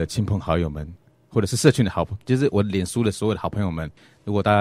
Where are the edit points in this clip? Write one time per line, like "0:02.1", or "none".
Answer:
none